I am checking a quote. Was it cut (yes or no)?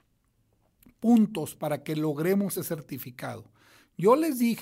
yes